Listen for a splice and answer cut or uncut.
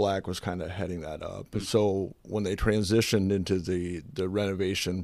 uncut